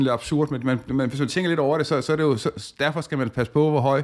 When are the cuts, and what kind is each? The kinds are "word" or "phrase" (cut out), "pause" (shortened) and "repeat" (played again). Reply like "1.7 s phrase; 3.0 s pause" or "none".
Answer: none